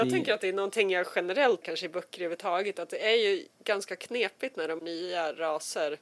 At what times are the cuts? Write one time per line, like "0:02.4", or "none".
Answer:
0:01.6
0:03.5
0:04.8